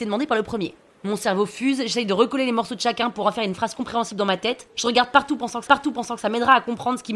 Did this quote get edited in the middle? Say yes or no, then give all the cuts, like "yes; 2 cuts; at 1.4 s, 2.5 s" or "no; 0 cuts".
yes; 1 cut; at 5.7 s